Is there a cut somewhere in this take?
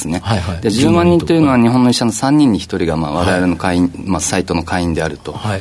no; 0 cuts

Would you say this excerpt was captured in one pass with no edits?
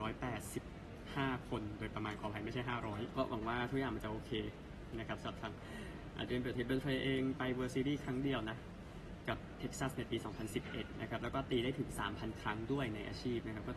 no; 1 cut; at 3.1 s

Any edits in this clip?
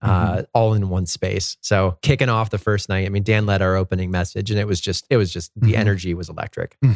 no; 0 cuts

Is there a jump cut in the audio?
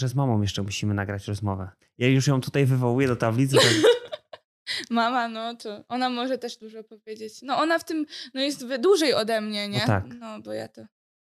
no; 0 cuts

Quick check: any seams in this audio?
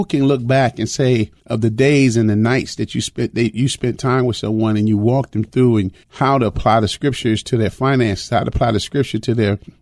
yes; 2 cuts; at 1.4 s, 6.0 s

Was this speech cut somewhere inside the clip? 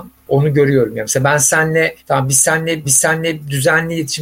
yes; 2 cuts; at 2.0 s, 2.8 s

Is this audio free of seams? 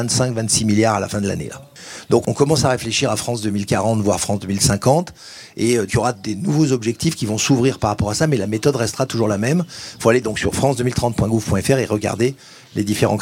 no; 1 cut; at 5.9 s

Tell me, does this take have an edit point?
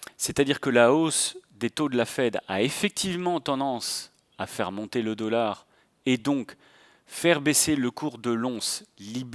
no; 0 cuts

